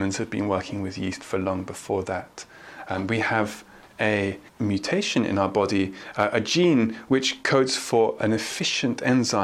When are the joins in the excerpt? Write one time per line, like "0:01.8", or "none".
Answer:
0:04.5
0:08.2